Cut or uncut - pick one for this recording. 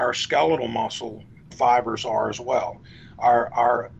cut